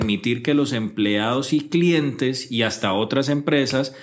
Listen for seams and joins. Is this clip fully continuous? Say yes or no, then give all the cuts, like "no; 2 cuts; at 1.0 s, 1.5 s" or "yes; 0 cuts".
yes; 0 cuts